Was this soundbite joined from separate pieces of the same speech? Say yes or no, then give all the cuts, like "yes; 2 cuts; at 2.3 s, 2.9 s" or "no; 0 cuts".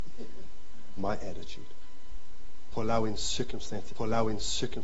yes; 2 cuts; at 1.0 s, 3.9 s